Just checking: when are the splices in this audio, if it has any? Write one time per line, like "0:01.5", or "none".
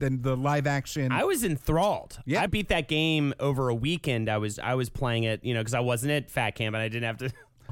0:02.5
0:04.6